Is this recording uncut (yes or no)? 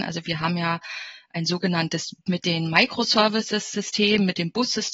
no